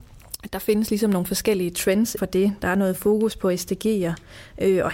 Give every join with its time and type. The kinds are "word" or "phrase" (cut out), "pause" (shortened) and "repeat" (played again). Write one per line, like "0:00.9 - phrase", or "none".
0:02.2 - word